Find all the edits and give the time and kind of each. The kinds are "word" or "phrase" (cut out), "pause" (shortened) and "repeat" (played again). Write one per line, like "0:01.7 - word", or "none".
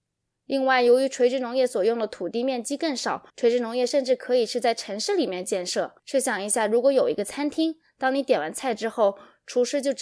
0:03.3 - pause
0:06.0 - pause